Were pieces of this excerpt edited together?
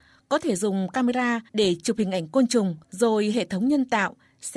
yes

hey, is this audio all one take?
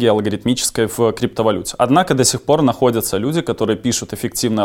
yes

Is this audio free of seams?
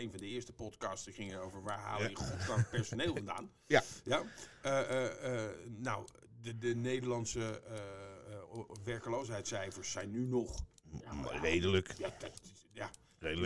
yes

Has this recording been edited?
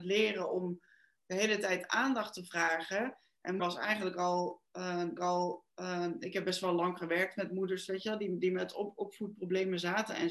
yes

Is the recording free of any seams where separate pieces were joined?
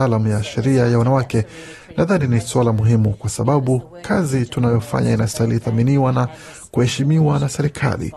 yes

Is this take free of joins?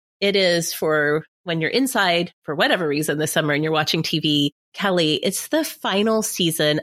no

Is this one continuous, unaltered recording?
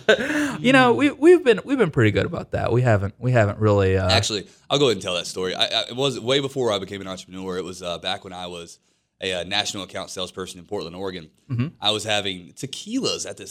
yes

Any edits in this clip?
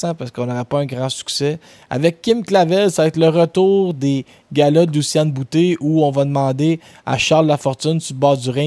no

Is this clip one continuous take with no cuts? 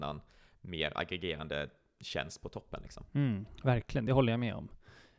yes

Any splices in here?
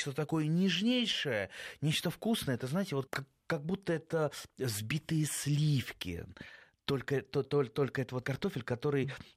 yes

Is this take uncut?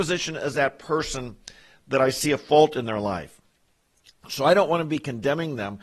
yes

